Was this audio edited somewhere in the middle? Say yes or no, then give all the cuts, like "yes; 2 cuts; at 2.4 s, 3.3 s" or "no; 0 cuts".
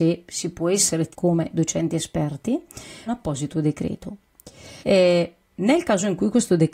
yes; 3 cuts; at 1.1 s, 3.1 s, 4.8 s